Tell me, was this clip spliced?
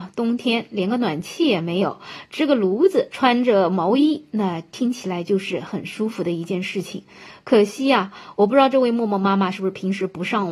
no; 0 cuts

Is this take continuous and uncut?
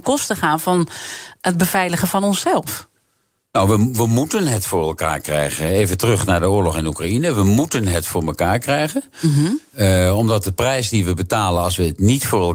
yes; 0 cuts

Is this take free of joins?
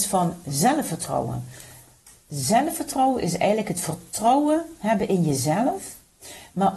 yes; 0 cuts

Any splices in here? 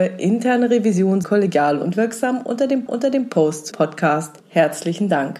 yes; 4 cuts; at 1.2 s, 2.9 s, 3.7 s, 4.4 s

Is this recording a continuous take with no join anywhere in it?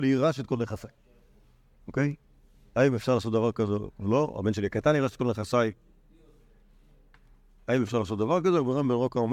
yes; 0 cuts

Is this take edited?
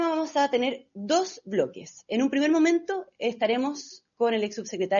no; 0 cuts

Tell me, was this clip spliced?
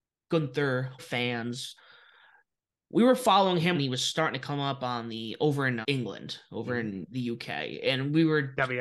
yes; 3 cuts; at 1.0 s, 3.7 s, 5.8 s

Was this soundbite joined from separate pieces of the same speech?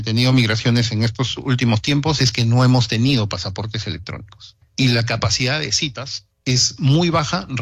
yes; 2 cuts; at 4.6 s, 6.3 s

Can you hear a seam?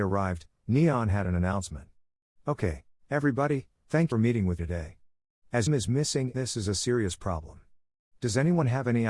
yes; 5 cuts; at 2.9 s, 4.1 s, 4.6 s, 5.7 s, 6.3 s

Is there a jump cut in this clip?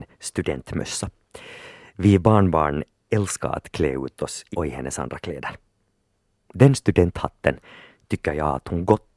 yes; 1 cut; at 4.5 s

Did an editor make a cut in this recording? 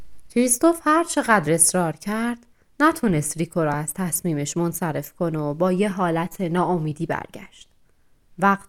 no; 0 cuts

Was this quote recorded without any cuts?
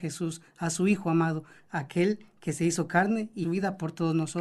no; 1 cut; at 3.4 s

